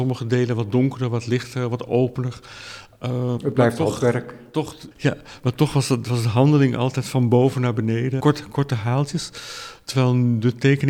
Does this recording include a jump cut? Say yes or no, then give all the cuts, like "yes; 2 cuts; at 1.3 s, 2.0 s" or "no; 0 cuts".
yes; 3 cuts; at 3.4 s, 4.9 s, 8.2 s